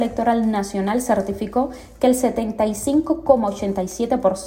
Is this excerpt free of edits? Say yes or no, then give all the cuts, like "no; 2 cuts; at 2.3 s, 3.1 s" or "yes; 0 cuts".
yes; 0 cuts